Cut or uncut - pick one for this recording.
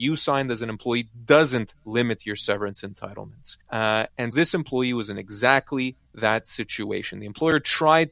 cut